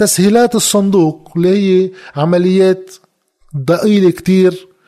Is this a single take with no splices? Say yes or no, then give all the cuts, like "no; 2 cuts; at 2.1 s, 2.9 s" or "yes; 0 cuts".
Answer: yes; 0 cuts